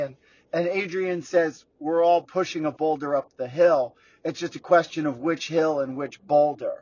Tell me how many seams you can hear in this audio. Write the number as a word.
zero